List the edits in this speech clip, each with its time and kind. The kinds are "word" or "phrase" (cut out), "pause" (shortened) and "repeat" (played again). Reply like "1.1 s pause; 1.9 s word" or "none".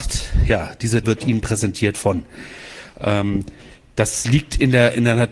1.0 s word